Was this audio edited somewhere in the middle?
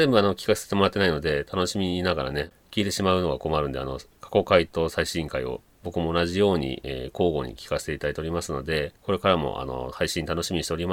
yes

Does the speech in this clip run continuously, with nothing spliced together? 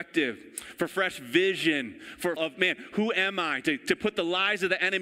no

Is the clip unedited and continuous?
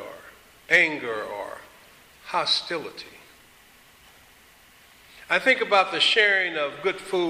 yes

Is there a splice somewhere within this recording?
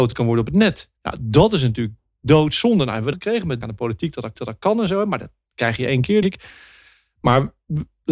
yes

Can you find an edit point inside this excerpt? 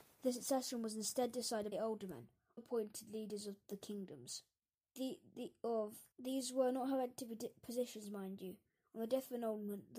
yes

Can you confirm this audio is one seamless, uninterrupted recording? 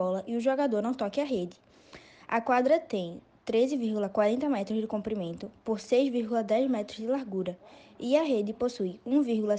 yes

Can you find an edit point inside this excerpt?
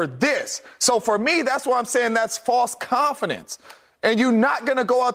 no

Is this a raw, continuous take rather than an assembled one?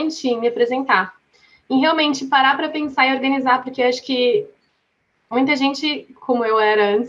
yes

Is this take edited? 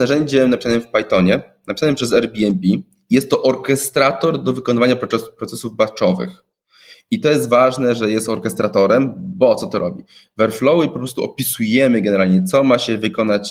no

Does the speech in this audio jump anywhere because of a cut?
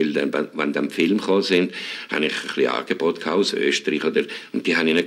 no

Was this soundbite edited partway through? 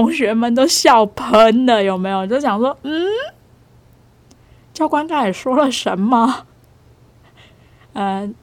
no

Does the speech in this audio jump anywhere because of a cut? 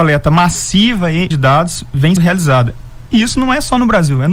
yes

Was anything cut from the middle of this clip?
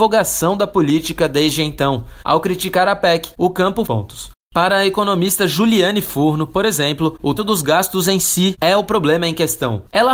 yes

